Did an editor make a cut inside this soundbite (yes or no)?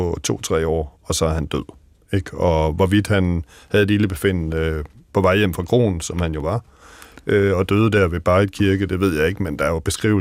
no